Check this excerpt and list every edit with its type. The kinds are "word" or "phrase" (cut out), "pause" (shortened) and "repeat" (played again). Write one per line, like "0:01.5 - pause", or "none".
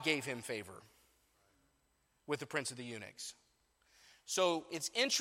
none